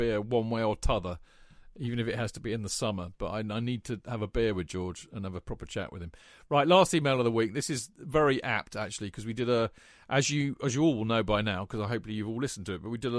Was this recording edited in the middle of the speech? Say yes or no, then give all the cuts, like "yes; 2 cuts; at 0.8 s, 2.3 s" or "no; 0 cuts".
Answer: no; 0 cuts